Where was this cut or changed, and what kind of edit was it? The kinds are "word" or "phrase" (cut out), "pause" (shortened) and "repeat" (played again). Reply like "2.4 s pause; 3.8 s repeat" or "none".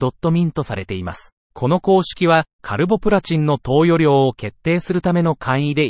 1.4 s pause; 2.5 s pause